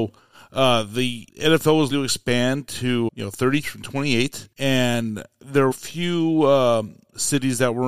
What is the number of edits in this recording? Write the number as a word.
six